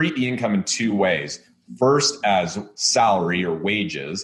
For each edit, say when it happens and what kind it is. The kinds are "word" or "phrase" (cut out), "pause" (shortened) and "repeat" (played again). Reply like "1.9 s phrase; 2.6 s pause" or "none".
none